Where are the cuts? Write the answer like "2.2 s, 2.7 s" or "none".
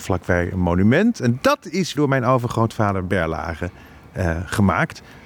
1.9 s